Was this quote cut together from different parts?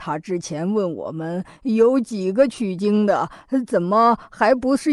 no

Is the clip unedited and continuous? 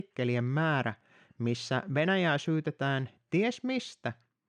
yes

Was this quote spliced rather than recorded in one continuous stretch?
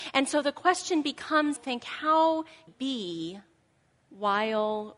yes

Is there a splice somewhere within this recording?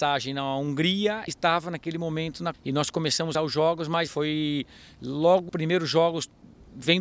yes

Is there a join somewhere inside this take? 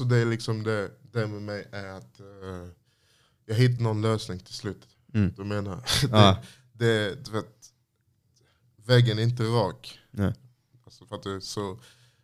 yes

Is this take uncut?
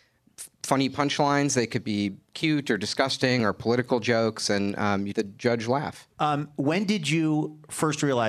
no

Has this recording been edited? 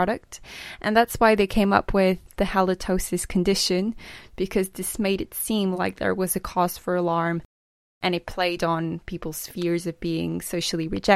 no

